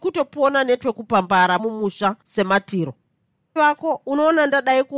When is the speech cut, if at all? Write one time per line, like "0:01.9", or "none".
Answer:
0:01.6
0:03.6